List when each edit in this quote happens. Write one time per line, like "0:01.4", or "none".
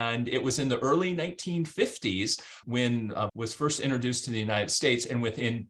0:02.6
0:03.3